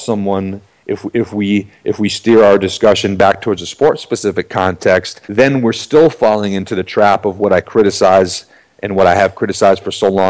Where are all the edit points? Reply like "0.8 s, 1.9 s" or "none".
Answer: 5.2 s